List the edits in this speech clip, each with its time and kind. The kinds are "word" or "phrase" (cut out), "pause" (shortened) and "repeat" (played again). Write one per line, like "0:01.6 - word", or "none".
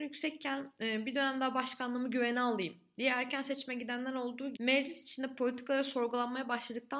0:04.6 - word